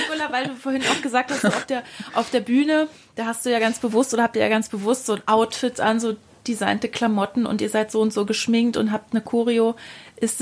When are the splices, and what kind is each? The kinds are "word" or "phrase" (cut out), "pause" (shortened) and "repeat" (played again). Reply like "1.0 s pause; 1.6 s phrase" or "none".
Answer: none